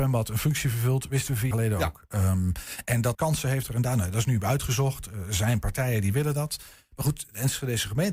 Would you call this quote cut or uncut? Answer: cut